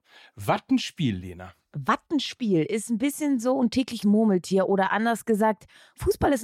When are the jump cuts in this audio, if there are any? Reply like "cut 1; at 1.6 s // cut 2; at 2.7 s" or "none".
cut 1; at 4.0 s